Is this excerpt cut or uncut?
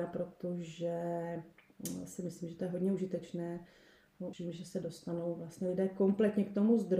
cut